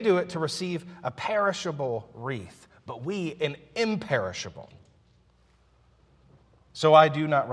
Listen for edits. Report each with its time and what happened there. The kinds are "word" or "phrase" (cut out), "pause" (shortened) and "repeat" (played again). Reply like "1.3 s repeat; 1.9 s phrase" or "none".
none